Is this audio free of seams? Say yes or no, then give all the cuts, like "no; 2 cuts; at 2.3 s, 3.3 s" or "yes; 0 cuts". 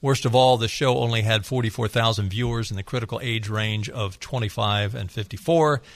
yes; 0 cuts